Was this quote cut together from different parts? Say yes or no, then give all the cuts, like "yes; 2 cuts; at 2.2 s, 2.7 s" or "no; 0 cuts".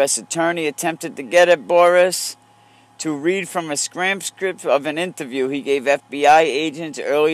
no; 0 cuts